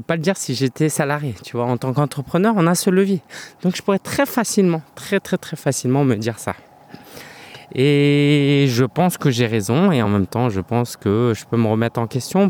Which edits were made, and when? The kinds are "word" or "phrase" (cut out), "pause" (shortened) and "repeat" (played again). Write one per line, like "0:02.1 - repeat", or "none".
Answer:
none